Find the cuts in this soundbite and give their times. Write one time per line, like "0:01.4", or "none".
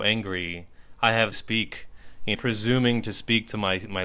0:01.3
0:02.3